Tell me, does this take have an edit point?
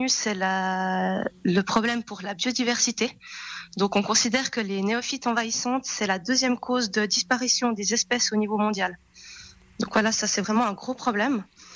no; 0 cuts

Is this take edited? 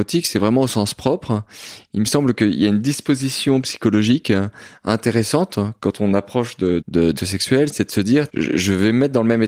yes; 3 cuts; at 6.8 s, 7.2 s, 8.3 s

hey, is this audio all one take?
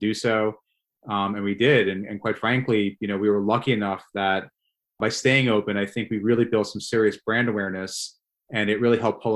yes; 0 cuts

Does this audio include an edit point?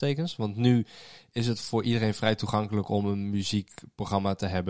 no; 0 cuts

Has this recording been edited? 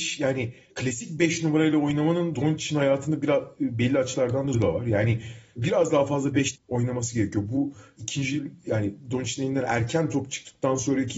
yes; 3 cuts; at 2.3 s, 4.5 s, 6.5 s

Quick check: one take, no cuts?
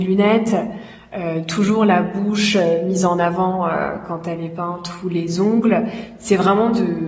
yes; 0 cuts

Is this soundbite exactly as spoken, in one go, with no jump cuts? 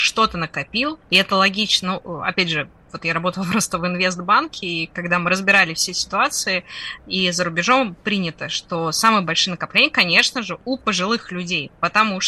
no; 1 cut; at 1.0 s

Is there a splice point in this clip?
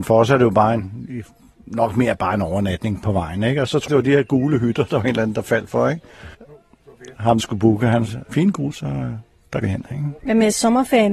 yes; 7 cuts; at 3.9 s, 6.3 s, 7.4 s, 8.3 s, 8.7 s, 9.6 s, 10.2 s

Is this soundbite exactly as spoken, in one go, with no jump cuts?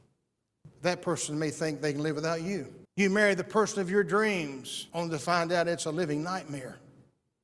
no; 2 cuts; at 2.8 s, 4.9 s

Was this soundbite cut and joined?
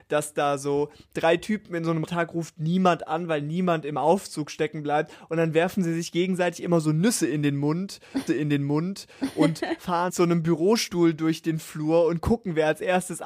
yes; 3 cuts; at 2.1 s, 8.3 s, 10.1 s

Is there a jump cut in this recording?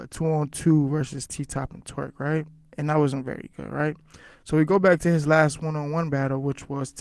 no; 0 cuts

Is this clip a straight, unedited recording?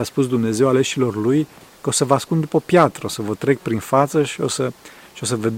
yes; 0 cuts

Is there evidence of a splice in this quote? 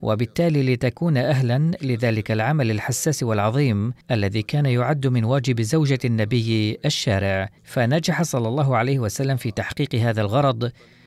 yes; 2 cuts; at 4.0 s, 7.6 s

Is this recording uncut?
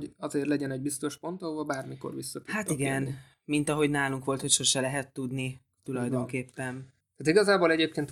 yes; 0 cuts

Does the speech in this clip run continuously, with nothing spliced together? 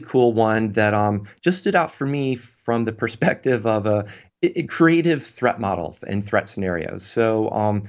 yes; 0 cuts

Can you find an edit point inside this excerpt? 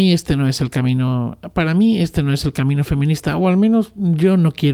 no; 0 cuts

